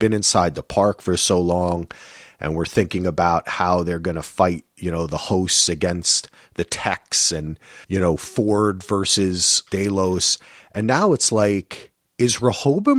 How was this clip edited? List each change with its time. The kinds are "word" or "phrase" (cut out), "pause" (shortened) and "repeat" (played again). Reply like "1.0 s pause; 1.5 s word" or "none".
7.8 s pause; 9.7 s word